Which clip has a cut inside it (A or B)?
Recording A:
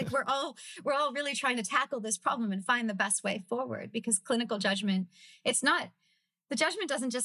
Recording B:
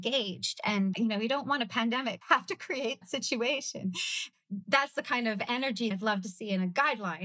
B